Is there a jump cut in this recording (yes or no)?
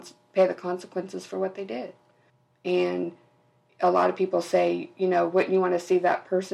no